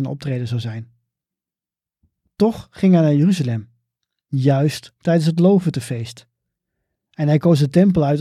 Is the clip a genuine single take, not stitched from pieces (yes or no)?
yes